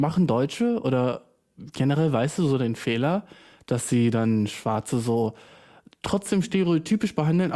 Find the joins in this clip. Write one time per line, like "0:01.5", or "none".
none